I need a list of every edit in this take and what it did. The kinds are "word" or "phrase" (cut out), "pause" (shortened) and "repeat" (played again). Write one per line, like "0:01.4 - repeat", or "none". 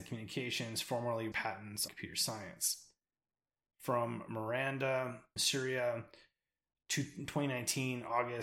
0:01.3 - word
0:01.9 - word
0:05.4 - word